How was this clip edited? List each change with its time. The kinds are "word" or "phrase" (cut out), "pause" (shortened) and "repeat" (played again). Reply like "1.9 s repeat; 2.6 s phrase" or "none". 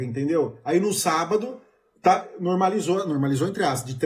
none